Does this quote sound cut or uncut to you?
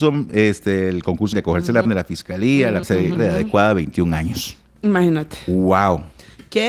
cut